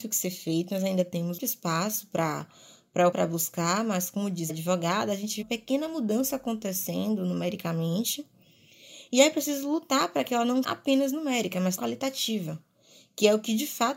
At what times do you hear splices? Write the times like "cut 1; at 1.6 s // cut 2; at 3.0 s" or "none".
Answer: cut 1; at 1.4 s // cut 2; at 3.1 s // cut 3; at 4.5 s // cut 4; at 5.4 s // cut 5; at 10.6 s // cut 6; at 11.8 s